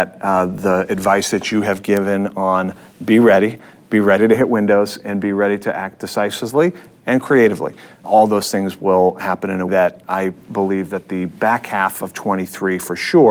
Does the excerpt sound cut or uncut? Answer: cut